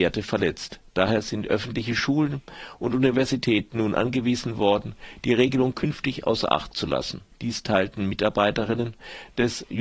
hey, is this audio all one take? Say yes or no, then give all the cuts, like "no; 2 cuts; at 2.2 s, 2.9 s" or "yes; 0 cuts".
no; 1 cut; at 7.3 s